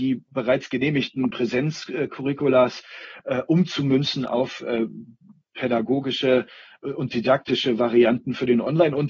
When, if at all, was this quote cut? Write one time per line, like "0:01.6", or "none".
none